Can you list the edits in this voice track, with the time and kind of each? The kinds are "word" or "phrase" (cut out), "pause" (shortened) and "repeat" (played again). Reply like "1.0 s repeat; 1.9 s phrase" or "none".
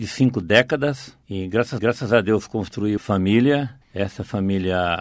1.2 s pause; 1.8 s repeat; 3.0 s word; 3.8 s pause